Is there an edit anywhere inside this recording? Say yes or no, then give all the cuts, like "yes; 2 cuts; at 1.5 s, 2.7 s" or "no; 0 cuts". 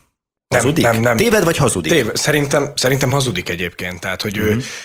no; 0 cuts